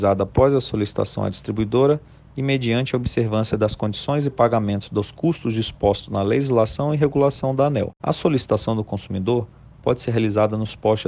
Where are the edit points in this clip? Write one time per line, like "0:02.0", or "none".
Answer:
none